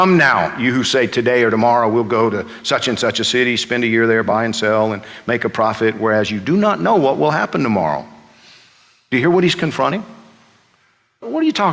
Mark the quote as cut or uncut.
uncut